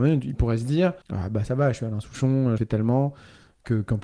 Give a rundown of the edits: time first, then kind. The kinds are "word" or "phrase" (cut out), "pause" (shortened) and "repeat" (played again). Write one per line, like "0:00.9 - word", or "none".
0:01.0 - pause
0:02.6 - phrase